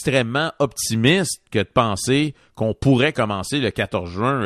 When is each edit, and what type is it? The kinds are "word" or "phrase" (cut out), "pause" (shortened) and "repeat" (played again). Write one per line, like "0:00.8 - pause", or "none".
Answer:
none